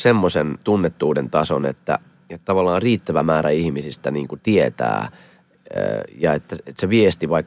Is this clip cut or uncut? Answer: uncut